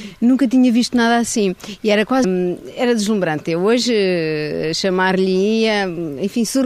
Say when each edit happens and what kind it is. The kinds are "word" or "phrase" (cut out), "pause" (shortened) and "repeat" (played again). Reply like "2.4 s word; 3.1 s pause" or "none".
2.2 s word